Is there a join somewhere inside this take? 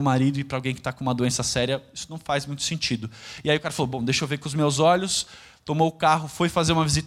no; 0 cuts

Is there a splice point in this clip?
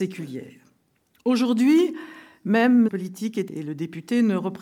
yes; 2 cuts; at 2.9 s, 3.5 s

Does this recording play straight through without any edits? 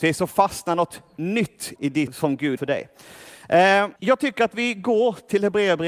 no; 4 cuts; at 1.8 s, 2.1 s, 2.6 s, 4.0 s

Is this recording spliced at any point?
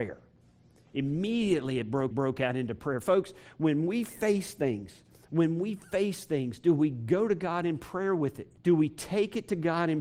yes; 2 cuts; at 2.1 s, 8.6 s

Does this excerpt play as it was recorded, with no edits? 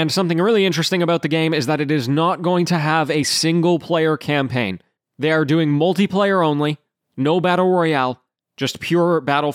yes; 0 cuts

